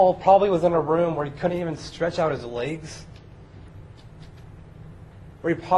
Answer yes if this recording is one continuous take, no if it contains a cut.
yes